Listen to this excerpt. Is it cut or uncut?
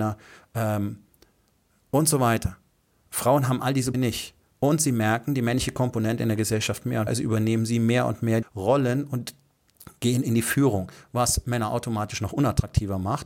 cut